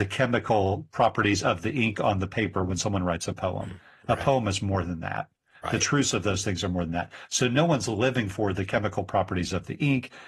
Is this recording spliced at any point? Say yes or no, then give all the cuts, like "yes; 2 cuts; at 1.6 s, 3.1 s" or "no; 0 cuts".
no; 0 cuts